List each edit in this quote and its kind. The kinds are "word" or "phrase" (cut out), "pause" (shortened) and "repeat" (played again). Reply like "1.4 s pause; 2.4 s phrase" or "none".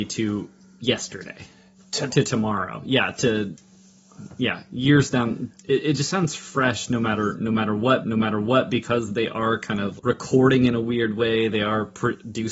2.1 s word; 5.6 s pause; 8.0 s repeat; 10.0 s word